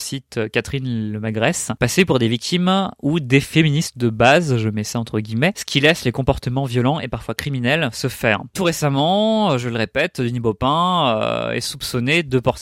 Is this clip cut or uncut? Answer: cut